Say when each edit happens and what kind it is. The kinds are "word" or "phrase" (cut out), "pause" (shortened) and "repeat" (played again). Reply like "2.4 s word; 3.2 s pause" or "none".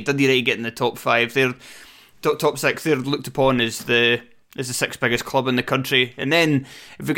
none